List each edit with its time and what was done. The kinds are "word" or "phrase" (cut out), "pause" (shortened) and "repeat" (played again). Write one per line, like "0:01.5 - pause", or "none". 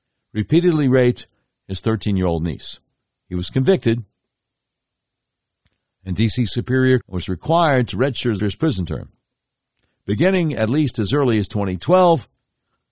0:03.0 - pause
0:07.0 - word
0:08.4 - phrase